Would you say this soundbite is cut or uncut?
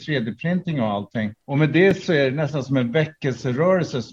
cut